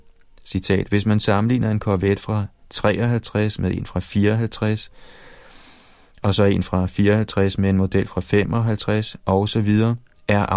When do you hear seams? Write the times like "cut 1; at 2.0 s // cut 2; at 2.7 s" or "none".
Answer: none